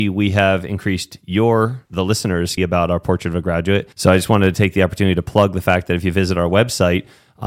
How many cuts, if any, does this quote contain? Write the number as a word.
three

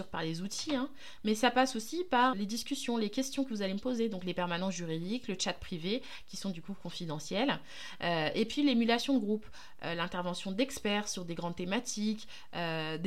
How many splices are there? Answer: one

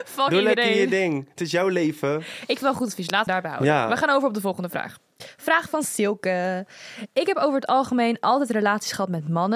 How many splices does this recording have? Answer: two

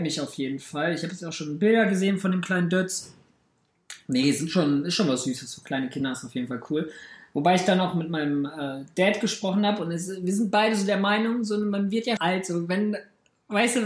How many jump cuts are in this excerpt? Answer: one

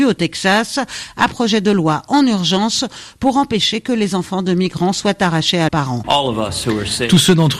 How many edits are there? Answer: two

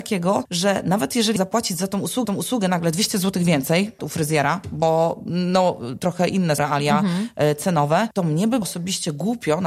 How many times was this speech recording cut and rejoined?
five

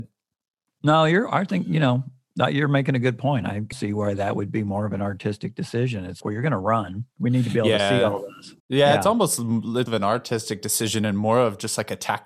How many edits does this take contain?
five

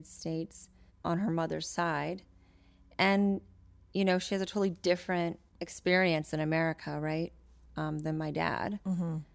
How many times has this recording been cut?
zero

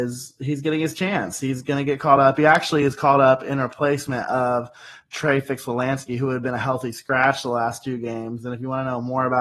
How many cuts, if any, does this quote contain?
zero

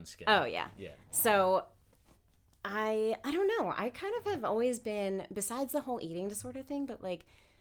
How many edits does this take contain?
zero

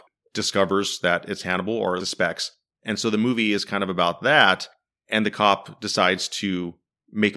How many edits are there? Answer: one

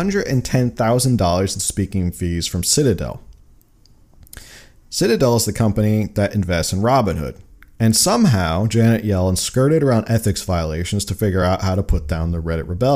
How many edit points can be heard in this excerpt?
zero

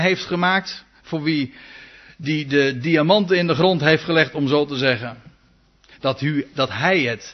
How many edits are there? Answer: zero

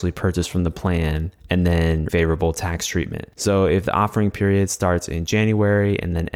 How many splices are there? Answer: three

